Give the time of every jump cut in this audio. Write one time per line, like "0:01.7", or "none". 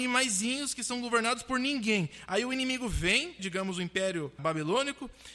0:03.4
0:04.4